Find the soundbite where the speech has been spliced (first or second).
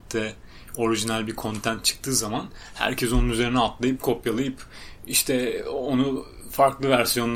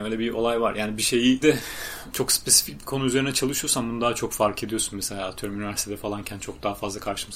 second